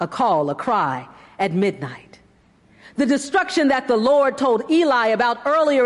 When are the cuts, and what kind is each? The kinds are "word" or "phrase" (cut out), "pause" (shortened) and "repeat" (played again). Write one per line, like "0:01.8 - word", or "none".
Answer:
none